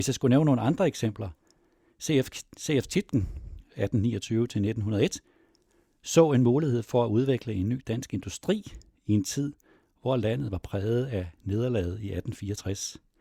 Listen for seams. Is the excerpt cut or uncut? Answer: uncut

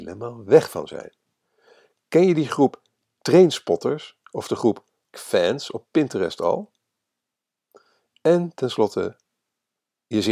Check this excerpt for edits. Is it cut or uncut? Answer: cut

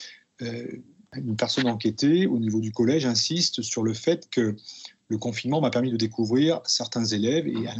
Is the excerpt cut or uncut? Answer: uncut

